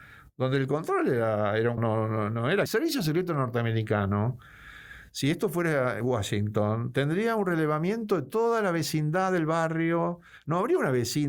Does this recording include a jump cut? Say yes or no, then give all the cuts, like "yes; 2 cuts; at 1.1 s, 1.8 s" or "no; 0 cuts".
yes; 2 cuts; at 1.8 s, 2.7 s